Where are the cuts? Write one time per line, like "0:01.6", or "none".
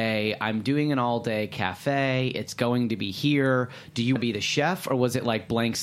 0:04.2